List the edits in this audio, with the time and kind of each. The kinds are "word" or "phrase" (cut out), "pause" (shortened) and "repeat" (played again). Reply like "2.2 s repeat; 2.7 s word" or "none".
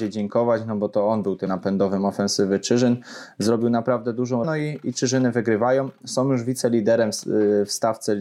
1.5 s word; 4.4 s word